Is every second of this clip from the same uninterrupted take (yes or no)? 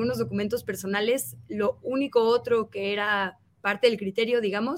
no